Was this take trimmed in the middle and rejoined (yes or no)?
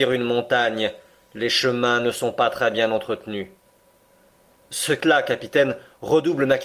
yes